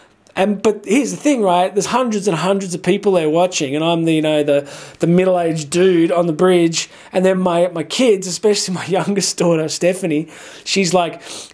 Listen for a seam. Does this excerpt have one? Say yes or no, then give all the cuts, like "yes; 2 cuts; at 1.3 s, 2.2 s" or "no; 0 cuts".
no; 0 cuts